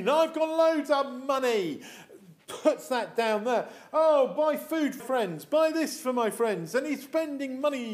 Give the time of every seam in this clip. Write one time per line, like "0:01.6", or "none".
0:05.0